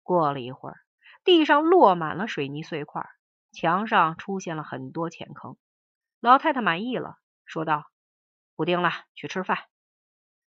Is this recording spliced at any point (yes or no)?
no